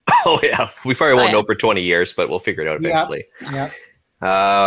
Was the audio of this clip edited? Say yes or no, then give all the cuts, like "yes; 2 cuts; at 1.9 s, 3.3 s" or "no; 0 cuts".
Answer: no; 0 cuts